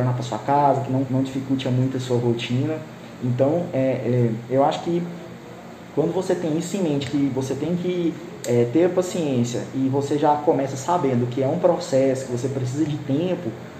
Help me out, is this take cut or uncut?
cut